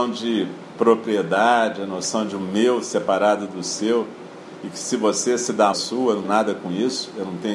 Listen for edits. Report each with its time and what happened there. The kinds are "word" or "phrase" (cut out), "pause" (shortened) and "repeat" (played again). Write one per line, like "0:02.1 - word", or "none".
0:05.7 - phrase
0:06.2 - word